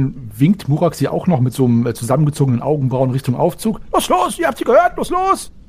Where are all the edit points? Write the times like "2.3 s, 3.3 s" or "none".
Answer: none